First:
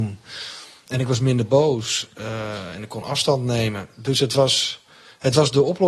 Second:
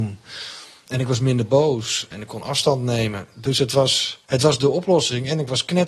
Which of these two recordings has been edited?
second; 2 cuts; at 2.1 s, 4.2 s

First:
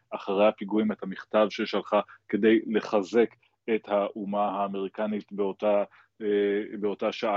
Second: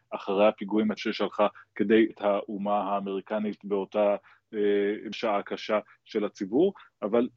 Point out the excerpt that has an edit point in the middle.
second; 3 cuts; at 1.0 s, 2.1 s, 5.1 s

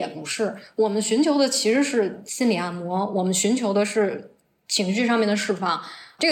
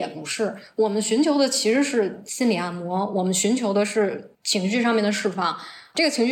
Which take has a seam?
second; 1 cut; at 4.3 s

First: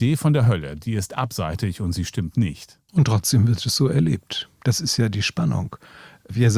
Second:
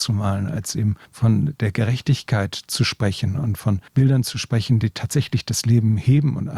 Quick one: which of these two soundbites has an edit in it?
second; 2 cuts; at 1.0 s, 3.9 s

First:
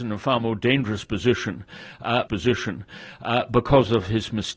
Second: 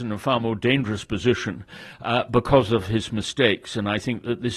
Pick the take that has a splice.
first; 1 cut; at 2.3 s

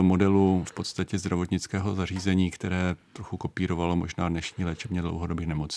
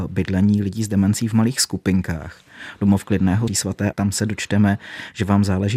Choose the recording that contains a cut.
second; 2 cuts; at 3.5 s, 3.9 s

